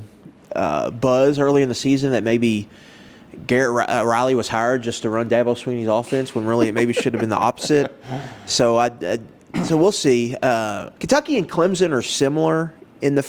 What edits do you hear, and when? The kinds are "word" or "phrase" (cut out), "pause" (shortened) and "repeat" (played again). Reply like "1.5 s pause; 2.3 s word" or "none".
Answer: 10.9 s pause